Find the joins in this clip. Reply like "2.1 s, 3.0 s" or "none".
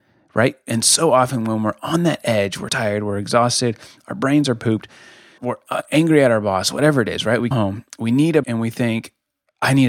2.7 s, 5.4 s, 7.5 s, 8.4 s